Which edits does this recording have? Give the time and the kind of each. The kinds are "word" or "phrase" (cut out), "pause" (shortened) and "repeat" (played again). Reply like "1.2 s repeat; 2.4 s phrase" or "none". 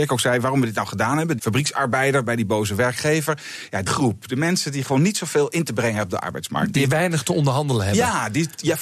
1.4 s word; 3.9 s word